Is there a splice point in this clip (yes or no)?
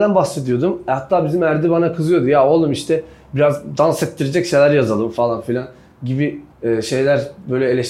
yes